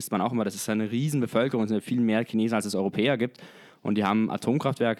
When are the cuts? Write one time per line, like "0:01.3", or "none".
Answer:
none